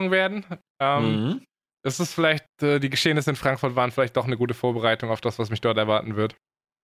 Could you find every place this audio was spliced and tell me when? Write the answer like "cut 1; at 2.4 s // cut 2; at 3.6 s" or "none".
cut 1; at 1.7 s